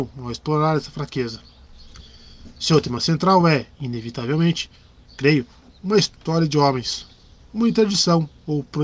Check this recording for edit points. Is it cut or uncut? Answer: uncut